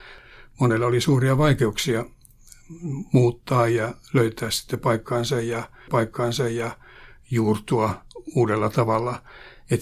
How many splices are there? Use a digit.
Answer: 1